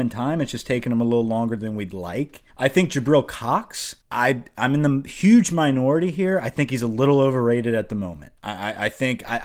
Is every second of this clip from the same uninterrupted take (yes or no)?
no